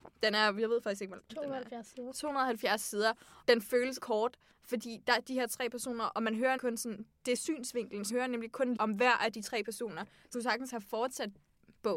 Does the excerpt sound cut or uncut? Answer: cut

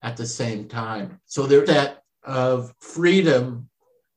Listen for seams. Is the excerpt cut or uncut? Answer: cut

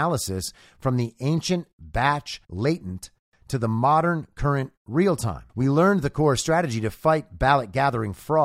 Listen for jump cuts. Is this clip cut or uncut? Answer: cut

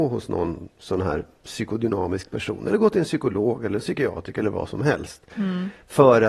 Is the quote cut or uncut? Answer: uncut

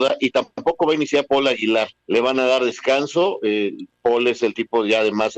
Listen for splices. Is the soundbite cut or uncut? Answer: cut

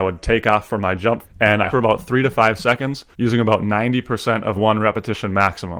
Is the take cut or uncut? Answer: cut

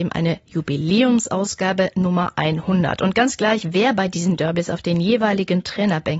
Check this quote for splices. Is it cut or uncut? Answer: uncut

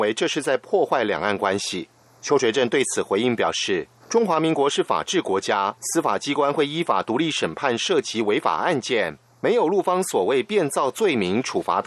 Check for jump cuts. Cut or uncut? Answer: cut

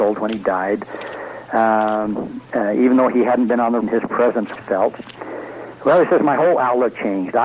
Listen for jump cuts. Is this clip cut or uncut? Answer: cut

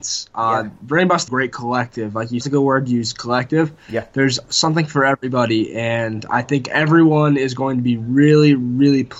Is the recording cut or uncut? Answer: cut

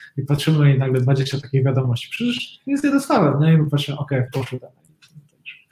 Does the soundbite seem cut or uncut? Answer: cut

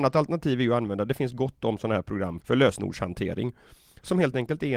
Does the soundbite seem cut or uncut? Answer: cut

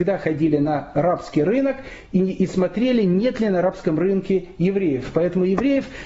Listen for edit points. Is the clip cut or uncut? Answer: uncut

